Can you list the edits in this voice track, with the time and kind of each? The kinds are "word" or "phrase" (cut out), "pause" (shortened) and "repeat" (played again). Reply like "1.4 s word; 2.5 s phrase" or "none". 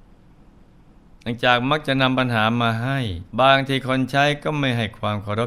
3.3 s pause